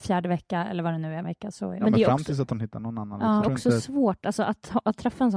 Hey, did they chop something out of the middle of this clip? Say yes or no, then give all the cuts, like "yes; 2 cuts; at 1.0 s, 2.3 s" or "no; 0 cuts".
yes; 2 cuts; at 1.2 s, 3.4 s